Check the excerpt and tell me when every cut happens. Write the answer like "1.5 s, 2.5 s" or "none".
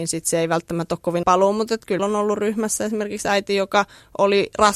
1.2 s, 2.0 s

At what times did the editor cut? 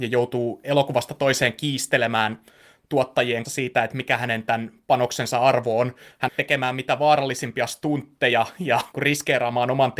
3.4 s, 6.3 s, 8.9 s

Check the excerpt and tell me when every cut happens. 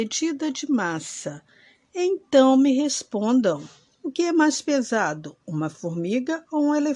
none

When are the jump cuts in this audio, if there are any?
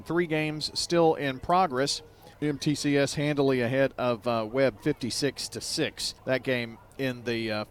2.3 s, 6.2 s

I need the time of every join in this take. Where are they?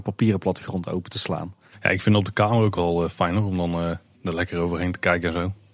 1.7 s, 2.7 s

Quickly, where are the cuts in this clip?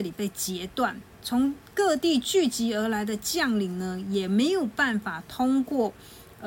1.1 s

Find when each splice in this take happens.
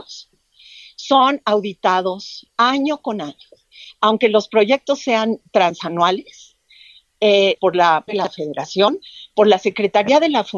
7.6 s, 8.1 s

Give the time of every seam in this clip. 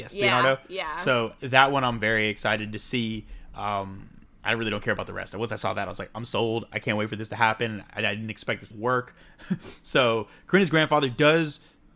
8.7 s

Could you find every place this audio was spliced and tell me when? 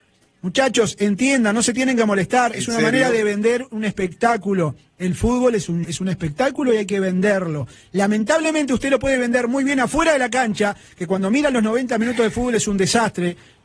5.8 s

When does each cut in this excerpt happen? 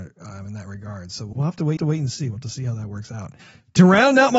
1.3 s, 1.8 s, 3.4 s

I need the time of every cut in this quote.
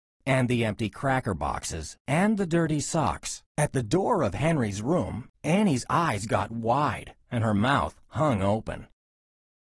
2.0 s, 3.5 s, 5.3 s, 7.2 s

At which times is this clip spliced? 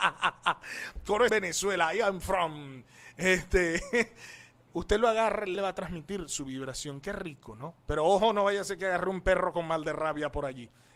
1.3 s, 4.7 s, 5.5 s, 7.8 s

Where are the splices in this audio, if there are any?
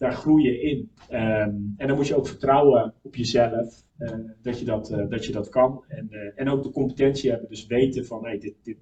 1.0 s, 3.9 s

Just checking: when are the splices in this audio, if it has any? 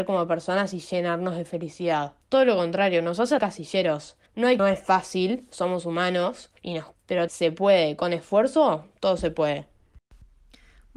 2.2 s, 3.4 s, 4.3 s, 4.6 s, 6.6 s, 6.9 s, 7.3 s

